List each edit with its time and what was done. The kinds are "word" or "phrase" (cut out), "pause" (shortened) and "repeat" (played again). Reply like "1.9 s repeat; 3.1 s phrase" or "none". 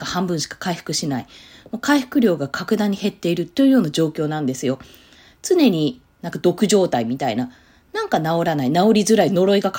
none